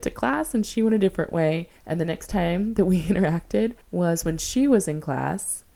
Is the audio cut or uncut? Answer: cut